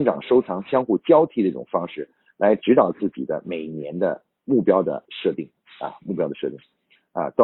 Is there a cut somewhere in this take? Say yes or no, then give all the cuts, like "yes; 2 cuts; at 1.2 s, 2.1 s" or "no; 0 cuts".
no; 0 cuts